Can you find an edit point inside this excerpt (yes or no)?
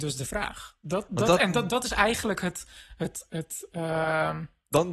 no